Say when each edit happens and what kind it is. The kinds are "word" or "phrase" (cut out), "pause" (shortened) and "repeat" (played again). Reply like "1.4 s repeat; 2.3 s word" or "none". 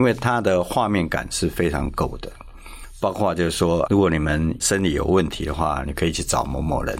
3.9 s word